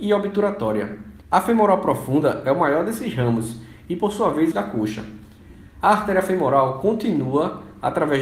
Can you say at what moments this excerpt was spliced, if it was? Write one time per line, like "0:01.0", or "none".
0:01.2
0:04.5